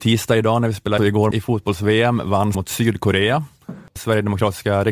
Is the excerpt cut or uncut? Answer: cut